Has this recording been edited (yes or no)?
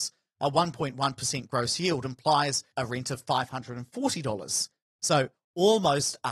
no